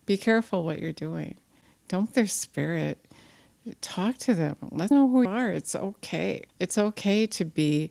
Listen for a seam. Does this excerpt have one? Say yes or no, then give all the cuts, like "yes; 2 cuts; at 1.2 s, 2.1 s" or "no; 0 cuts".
yes; 5 cuts; at 2.1 s, 3.8 s, 4.9 s, 5.2 s, 6.5 s